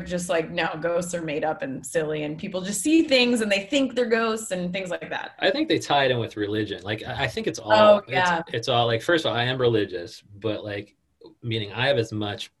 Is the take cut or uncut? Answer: uncut